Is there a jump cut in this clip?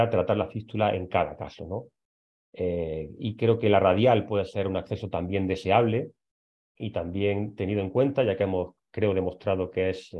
no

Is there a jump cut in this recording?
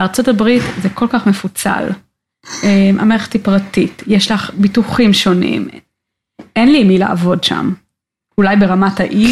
no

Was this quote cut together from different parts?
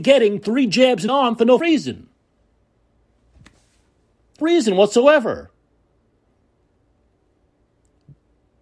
yes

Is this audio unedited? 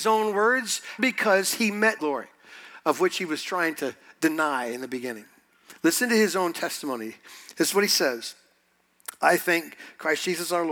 no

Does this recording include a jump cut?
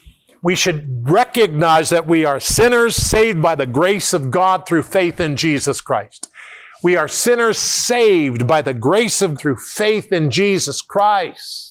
yes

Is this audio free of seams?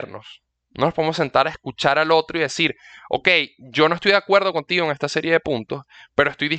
yes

